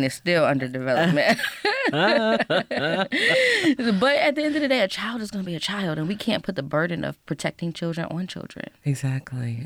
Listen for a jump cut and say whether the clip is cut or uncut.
uncut